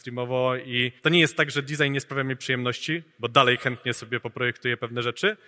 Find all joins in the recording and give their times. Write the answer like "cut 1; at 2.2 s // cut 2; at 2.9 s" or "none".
cut 1; at 1.0 s